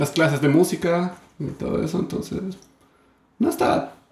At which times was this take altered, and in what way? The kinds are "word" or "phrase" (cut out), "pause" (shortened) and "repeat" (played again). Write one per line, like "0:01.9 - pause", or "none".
none